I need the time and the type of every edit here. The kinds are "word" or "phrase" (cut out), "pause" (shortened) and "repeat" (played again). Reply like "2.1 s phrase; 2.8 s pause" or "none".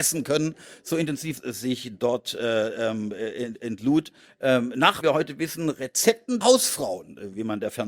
1.4 s phrase; 5.0 s word; 6.4 s word